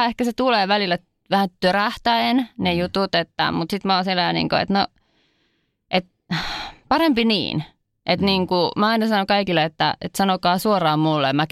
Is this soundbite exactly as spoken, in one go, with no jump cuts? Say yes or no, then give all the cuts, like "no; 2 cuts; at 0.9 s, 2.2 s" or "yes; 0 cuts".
yes; 0 cuts